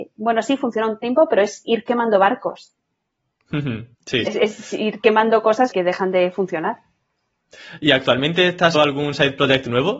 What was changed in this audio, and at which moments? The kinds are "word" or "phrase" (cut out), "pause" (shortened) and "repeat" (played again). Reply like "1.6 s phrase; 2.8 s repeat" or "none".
3.9 s pause; 4.3 s word; 5.7 s word; 8.7 s word